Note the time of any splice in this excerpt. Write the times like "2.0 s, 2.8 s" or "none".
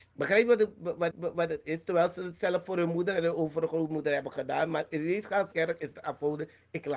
1.1 s, 5.5 s